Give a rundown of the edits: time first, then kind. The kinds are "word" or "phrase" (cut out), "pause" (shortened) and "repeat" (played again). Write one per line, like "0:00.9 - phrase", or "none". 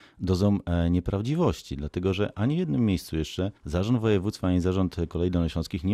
0:03.6 - pause